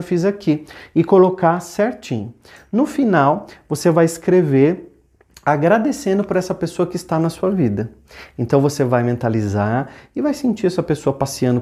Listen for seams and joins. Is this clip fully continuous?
yes; 0 cuts

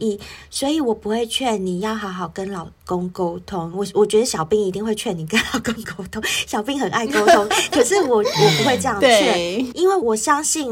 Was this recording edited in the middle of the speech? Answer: yes; 1 cut; at 9.7 s

